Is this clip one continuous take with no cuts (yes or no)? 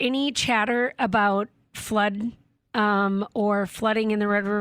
yes